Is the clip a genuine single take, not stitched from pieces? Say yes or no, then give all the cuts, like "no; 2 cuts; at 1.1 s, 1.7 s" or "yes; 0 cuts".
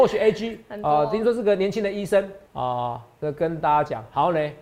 no; 1 cut; at 2.5 s